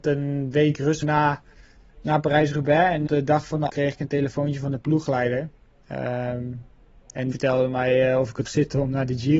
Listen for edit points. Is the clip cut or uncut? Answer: cut